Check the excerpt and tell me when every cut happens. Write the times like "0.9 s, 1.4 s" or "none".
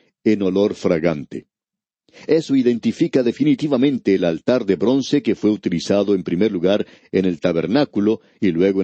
none